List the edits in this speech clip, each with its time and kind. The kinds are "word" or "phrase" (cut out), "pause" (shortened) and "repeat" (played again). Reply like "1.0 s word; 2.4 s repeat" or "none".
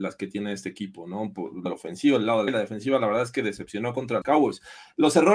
1.7 s word; 2.5 s word; 4.2 s word